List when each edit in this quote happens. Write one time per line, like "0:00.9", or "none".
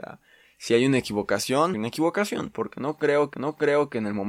0:01.7
0:03.3